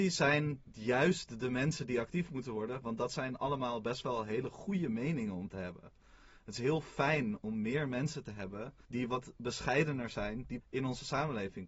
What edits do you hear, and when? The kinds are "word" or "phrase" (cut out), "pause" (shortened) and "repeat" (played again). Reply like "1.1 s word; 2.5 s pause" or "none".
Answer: 8.9 s pause; 10.6 s word

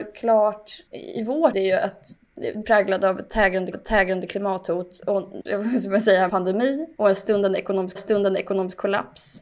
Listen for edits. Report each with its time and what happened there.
0.9 s word; 1.5 s word; 2.6 s phrase; 3.7 s repeat; 5.5 s phrase; 6.3 s phrase; 6.9 s pause; 8.0 s repeat

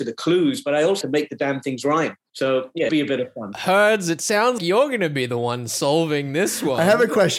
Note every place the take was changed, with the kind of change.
1.0 s word; 2.9 s phrase; 4.6 s word

